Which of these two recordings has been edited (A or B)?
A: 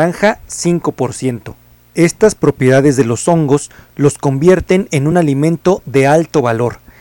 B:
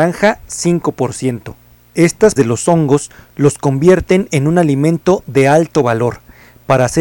B